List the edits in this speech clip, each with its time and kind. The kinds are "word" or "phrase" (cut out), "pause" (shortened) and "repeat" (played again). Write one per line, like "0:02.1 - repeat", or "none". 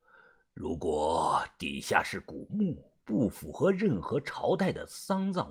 0:03.0 - pause